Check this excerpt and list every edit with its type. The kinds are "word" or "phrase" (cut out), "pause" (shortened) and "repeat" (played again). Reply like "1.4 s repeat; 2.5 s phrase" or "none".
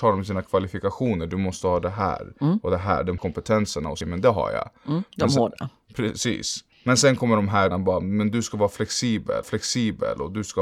3.2 s word; 4.0 s phrase; 6.7 s pause; 7.7 s word; 9.4 s repeat